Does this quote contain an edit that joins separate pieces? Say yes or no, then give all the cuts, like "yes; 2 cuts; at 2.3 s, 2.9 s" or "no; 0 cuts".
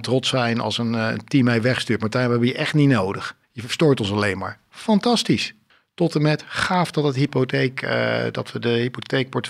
yes; 2 cuts; at 3.4 s, 5.7 s